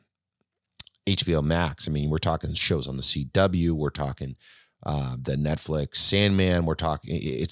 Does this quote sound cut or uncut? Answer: uncut